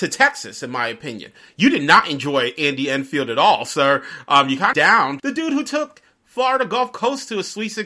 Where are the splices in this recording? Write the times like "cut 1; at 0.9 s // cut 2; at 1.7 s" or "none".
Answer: cut 1; at 4.7 s